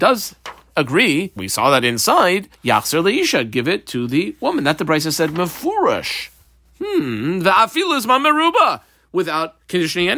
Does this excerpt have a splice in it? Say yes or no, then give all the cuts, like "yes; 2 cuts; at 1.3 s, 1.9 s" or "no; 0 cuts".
yes; 2 cuts; at 1.4 s, 2.5 s